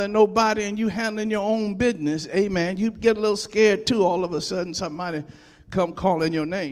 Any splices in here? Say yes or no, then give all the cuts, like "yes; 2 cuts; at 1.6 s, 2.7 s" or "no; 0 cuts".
no; 0 cuts